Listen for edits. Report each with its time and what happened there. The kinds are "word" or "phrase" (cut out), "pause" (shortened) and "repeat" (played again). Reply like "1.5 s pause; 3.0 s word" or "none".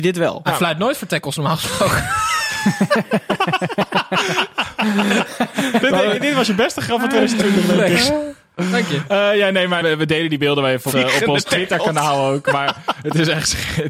9.8 s word; 10.9 s word